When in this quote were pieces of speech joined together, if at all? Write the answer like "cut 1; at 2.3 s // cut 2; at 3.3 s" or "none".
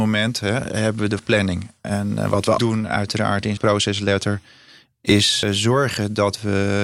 cut 1; at 1.2 s // cut 2; at 2.6 s // cut 3; at 3.6 s // cut 4; at 5.4 s